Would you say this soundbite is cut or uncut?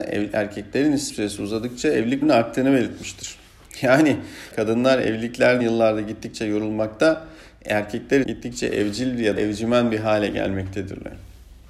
cut